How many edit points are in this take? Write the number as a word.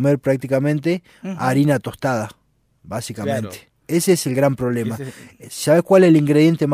zero